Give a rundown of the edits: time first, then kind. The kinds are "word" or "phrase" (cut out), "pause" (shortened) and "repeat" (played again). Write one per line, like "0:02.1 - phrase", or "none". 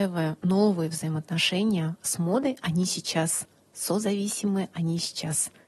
none